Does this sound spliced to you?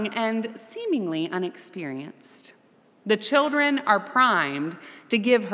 no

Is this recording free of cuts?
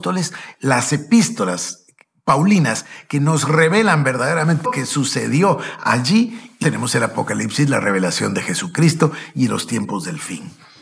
no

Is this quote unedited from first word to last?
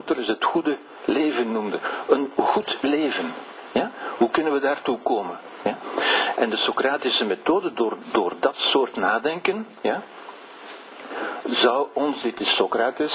yes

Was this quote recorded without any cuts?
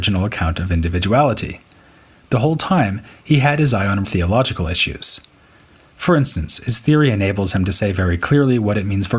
no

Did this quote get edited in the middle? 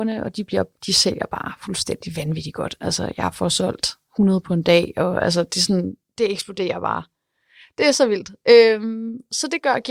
no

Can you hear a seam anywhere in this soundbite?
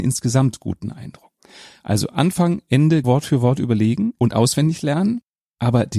yes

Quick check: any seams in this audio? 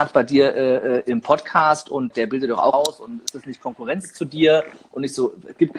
yes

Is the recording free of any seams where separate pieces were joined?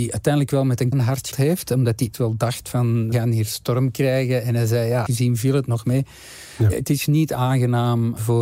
no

